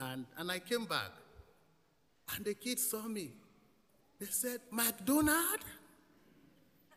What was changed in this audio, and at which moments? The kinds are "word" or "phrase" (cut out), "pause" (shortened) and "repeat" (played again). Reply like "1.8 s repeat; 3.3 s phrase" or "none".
none